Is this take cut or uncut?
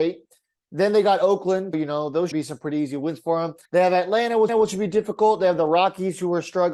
cut